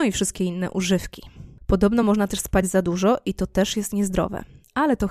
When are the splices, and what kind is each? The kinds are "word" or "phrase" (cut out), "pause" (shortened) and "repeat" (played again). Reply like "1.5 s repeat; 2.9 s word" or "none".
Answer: none